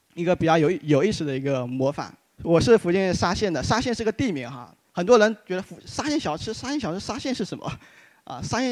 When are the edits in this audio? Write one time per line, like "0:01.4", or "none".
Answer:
none